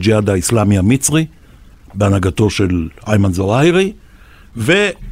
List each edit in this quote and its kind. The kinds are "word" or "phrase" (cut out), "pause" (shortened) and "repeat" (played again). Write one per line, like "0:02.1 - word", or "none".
none

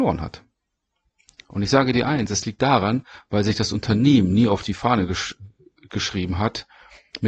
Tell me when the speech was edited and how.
none

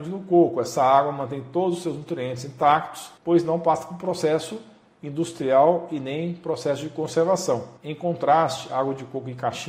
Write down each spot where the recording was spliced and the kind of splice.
0:03.2 - pause
0:07.8 - pause

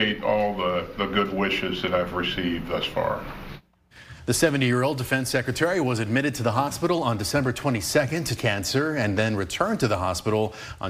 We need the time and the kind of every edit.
0:08.4 - phrase

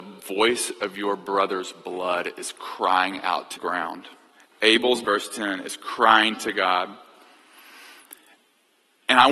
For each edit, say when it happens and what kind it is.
0:03.6 - phrase
0:05.0 - phrase

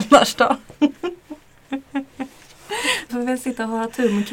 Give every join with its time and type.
0:03.1 - word

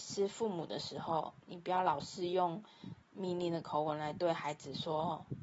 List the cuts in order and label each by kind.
0:01.4 - pause

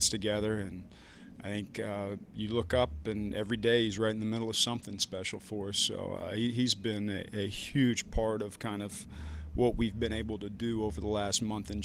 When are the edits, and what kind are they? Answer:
none

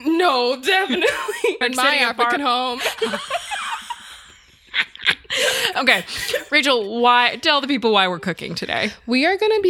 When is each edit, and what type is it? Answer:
0:01.6 - word
0:02.4 - word

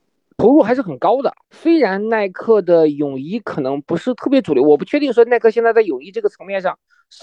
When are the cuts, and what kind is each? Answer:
0:01.4 - pause

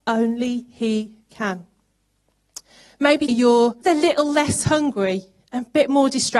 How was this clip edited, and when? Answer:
0:03.3 - word
0:03.8 - word

